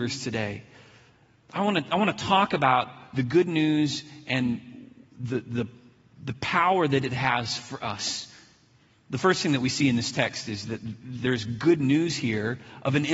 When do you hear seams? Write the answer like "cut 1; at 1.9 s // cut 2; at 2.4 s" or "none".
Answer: none